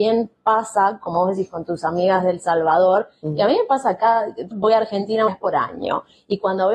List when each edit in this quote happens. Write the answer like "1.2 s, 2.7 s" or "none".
4.5 s, 5.3 s